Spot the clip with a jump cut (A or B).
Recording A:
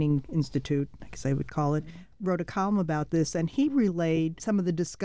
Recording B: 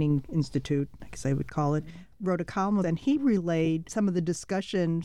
B